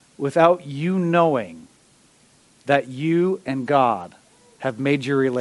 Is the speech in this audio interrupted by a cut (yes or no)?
no